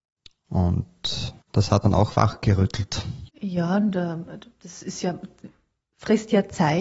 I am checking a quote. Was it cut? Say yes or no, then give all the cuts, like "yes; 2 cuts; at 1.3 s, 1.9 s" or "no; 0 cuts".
yes; 3 cuts; at 1.4 s, 1.8 s, 3.3 s